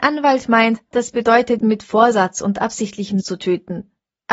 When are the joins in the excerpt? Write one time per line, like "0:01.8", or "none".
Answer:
0:00.9
0:01.6
0:03.2